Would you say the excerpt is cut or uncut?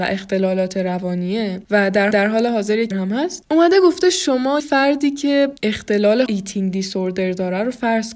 cut